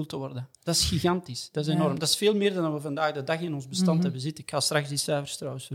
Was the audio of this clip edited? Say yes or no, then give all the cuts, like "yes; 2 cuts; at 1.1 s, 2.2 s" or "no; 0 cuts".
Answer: no; 0 cuts